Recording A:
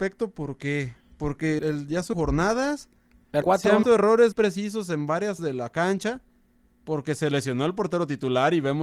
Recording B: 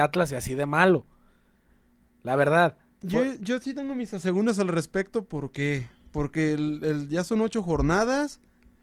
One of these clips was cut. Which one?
A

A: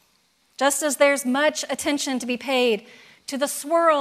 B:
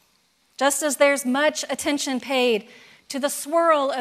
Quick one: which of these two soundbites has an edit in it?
B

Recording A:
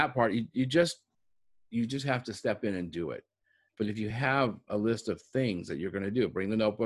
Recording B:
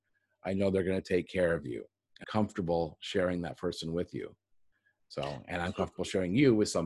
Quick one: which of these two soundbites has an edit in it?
B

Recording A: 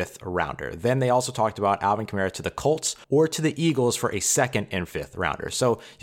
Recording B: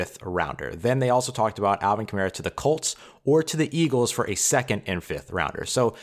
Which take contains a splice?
A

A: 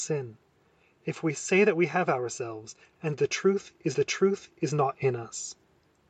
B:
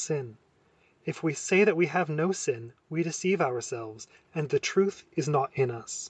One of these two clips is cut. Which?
A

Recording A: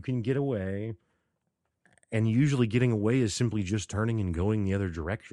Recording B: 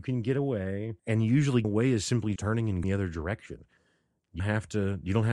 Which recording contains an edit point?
B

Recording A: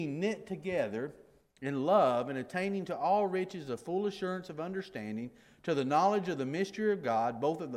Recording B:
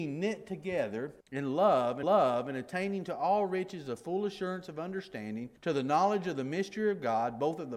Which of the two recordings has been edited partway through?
B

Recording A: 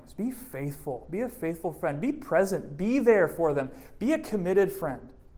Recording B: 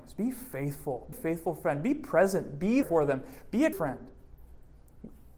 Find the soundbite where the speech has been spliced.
B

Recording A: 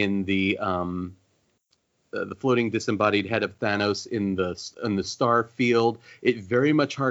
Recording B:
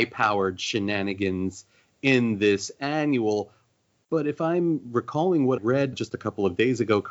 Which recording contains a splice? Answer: B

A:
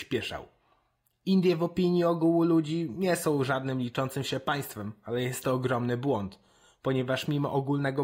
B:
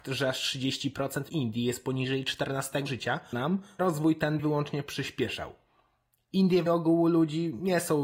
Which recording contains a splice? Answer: B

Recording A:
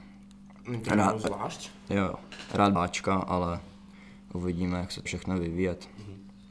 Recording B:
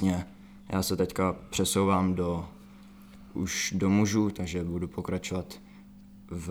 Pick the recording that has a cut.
A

